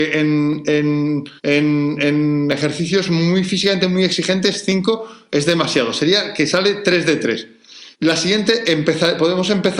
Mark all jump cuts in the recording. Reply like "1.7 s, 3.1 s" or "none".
1.4 s, 7.9 s